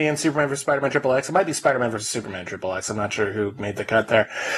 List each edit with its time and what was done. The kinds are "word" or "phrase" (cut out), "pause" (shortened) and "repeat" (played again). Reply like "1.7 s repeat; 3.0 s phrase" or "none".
none

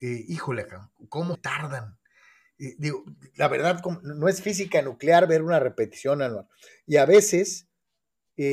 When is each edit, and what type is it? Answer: 1.3 s word

